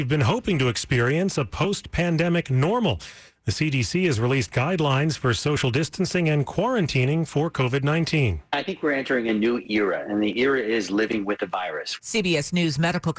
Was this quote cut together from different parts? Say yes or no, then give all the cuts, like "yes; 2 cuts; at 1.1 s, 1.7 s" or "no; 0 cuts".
no; 0 cuts